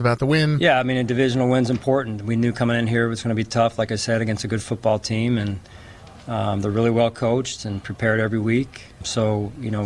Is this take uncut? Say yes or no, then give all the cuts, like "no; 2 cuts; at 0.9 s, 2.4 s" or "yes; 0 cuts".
yes; 0 cuts